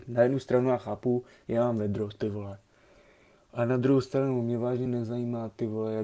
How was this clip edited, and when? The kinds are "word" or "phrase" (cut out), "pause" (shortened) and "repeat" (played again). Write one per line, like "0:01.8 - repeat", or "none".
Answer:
none